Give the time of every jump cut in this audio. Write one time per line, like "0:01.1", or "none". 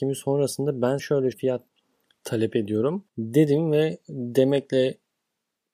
0:01.0
0:01.3
0:03.1